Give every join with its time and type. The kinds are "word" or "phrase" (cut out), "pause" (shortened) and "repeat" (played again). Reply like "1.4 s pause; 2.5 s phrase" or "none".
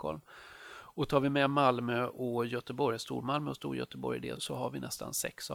4.4 s word

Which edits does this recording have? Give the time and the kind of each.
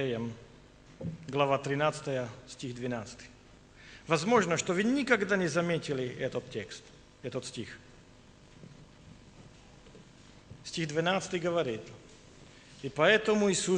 none

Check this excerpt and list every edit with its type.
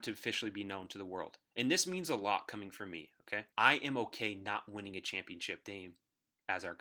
1.4 s pause; 3.5 s pause; 5.6 s word

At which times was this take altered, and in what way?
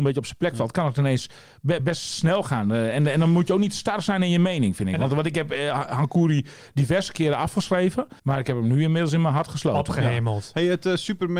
1.8 s word; 8.2 s pause

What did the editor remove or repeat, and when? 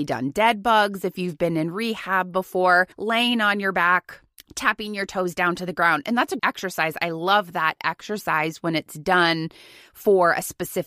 2.9 s pause; 4.4 s pause; 6.4 s word

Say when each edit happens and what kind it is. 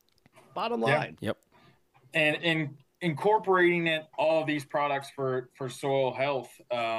2.4 s word; 4.1 s pause

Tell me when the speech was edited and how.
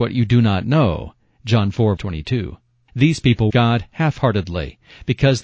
2.0 s word; 3.5 s word

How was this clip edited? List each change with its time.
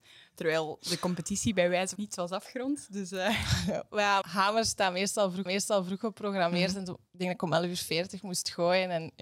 2.0 s phrase; 4.2 s word; 5.5 s repeat

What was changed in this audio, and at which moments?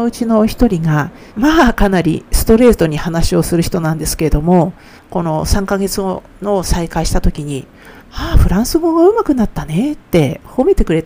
1.3 s pause; 5.0 s pause; 8.0 s pause

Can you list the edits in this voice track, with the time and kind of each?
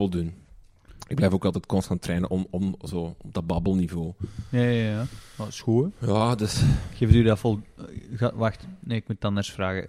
none

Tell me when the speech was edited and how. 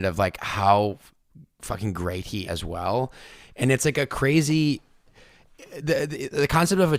2.4 s phrase

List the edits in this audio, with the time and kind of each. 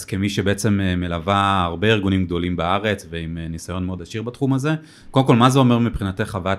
none

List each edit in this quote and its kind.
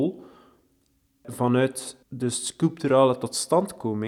2.0 s pause

